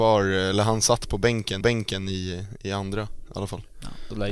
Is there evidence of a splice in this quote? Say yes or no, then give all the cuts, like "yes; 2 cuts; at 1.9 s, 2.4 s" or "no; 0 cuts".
yes; 1 cut; at 1.6 s